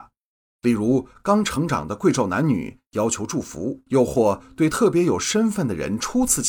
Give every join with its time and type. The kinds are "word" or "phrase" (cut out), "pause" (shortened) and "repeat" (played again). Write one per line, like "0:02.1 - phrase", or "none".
0:03.9 - pause

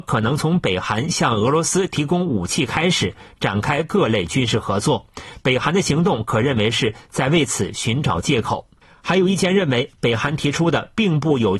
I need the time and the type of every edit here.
none

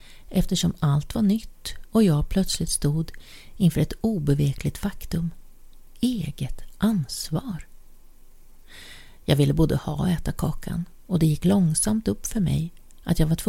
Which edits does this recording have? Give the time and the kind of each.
none

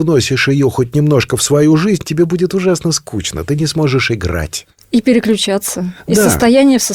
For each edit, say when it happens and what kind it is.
none

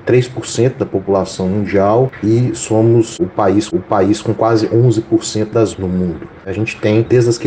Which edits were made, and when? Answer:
0:03.7 - repeat
0:05.7 - word

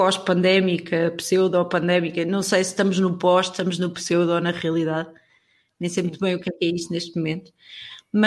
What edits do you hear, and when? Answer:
none

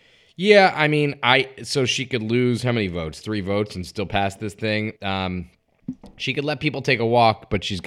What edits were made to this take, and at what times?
0:05.0 - pause

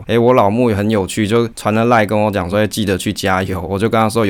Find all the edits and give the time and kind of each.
none

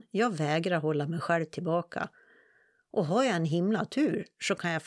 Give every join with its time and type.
none

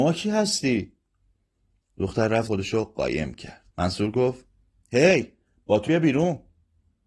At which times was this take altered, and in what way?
0:02.5 - phrase
0:03.7 - pause
0:05.9 - word

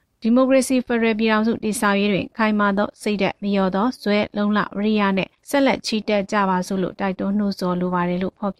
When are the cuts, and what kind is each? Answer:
0:05.4 - pause

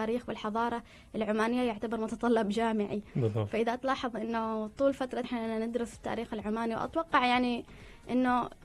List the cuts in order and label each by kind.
0:05.2 - word

